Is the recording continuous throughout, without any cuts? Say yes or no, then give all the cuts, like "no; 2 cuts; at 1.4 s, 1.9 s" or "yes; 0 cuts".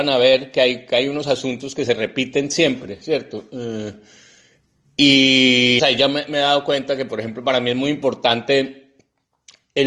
no; 1 cut; at 5.8 s